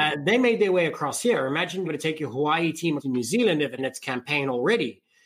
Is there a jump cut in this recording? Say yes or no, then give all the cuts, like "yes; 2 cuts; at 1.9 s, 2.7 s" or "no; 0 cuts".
yes; 3 cuts; at 1.8 s, 3.0 s, 3.8 s